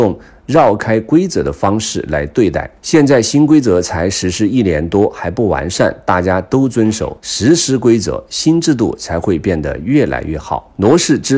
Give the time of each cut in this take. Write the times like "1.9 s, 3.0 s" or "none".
2.8 s, 7.2 s